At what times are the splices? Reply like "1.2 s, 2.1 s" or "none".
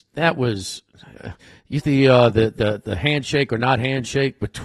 1.8 s